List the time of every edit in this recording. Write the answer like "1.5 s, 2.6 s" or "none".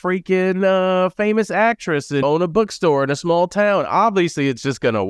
2.2 s